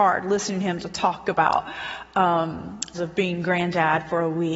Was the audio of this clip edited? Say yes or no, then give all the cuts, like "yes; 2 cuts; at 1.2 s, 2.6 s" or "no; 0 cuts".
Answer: yes; 1 cut; at 2.9 s